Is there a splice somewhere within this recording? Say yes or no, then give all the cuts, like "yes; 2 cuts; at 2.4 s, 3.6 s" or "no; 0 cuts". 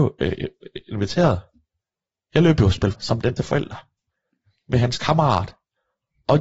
yes; 2 cuts; at 2.9 s, 3.4 s